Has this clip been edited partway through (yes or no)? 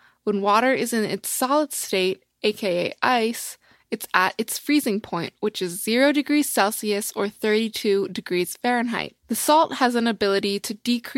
yes